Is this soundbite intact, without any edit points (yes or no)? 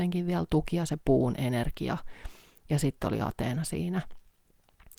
yes